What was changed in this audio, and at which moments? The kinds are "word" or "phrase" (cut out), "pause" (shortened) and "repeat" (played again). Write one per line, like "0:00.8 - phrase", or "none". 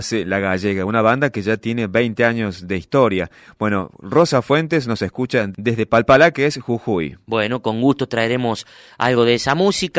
none